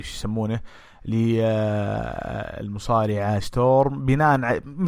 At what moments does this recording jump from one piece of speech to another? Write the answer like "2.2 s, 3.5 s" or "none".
3.4 s